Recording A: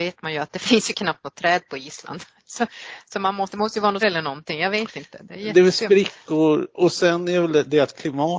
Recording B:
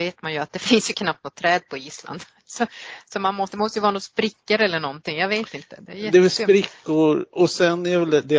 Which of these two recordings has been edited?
A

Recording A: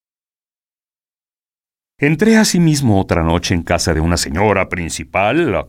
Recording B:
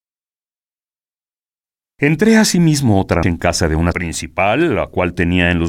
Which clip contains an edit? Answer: B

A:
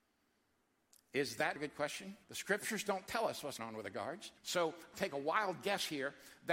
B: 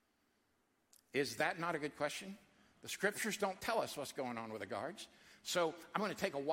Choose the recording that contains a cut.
A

